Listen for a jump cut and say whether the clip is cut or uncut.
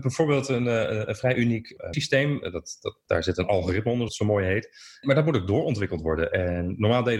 cut